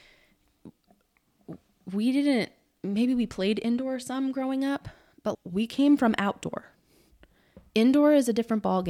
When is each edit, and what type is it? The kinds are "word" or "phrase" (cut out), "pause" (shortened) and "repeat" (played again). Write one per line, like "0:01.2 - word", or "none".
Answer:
0:05.3 - word

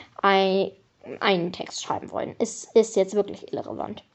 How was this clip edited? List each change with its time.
none

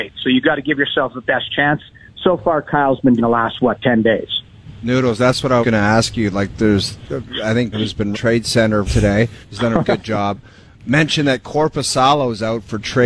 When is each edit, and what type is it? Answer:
0:03.2 - phrase
0:05.6 - word
0:07.7 - word
0:08.1 - word
0:08.8 - word
0:09.4 - pause
0:09.8 - word

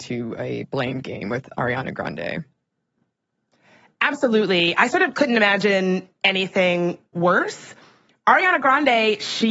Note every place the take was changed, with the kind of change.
none

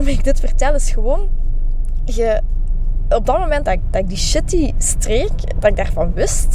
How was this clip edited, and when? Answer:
0:03.7 - word

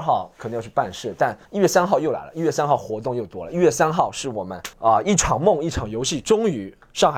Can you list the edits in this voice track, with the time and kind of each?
0:01.5 - pause
0:04.7 - pause

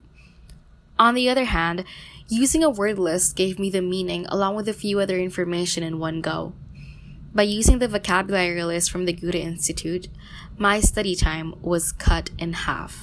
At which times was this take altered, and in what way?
none

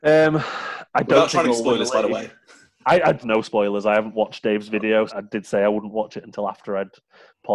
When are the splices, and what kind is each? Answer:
0:01.4 - phrase
0:03.2 - phrase
0:05.1 - word

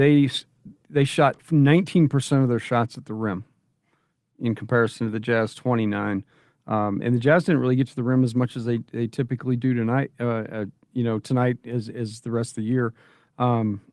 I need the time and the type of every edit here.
none

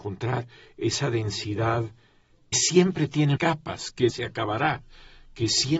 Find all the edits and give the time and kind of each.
0:02.5 - word
0:03.4 - word
0:04.1 - word

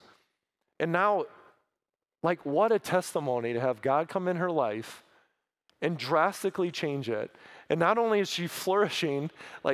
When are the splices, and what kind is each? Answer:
none

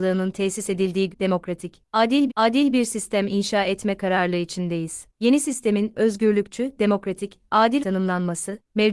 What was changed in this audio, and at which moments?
0:01.1 - phrase
0:02.3 - repeat
0:07.8 - word

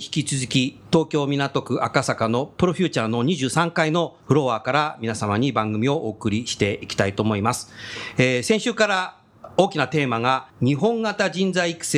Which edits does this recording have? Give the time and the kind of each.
0:04.2 - pause
0:10.5 - pause

